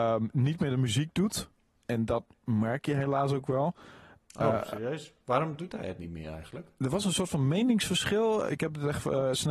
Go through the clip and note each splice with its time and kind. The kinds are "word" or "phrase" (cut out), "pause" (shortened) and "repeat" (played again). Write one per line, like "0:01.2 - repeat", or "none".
none